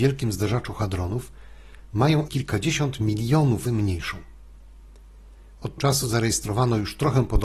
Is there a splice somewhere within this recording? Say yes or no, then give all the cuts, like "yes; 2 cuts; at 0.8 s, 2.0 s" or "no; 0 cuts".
yes; 3 cuts; at 2.3 s, 3.7 s, 5.8 s